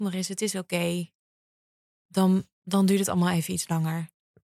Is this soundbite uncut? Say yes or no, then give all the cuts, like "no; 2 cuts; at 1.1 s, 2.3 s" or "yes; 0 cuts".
no; 1 cut; at 2.5 s